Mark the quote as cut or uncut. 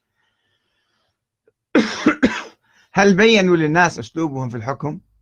cut